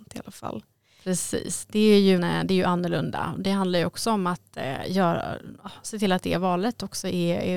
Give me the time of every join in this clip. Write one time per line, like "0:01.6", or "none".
0:02.2